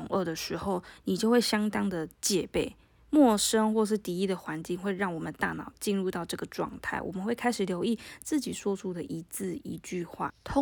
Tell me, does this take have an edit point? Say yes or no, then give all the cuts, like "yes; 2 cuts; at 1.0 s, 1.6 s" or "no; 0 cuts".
no; 0 cuts